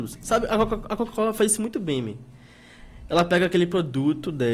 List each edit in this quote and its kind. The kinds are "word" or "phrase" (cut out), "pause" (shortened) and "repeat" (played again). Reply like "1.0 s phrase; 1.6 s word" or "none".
none